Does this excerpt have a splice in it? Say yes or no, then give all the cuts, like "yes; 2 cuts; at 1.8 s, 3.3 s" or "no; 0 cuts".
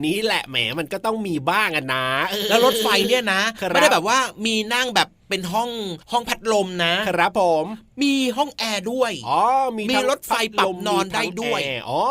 yes; 1 cut; at 6.0 s